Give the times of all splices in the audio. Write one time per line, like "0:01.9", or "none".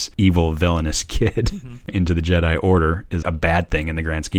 0:01.9
0:03.2